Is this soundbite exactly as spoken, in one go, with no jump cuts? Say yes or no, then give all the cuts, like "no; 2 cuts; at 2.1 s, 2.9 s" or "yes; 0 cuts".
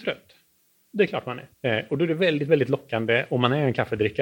no; 1 cut; at 1.5 s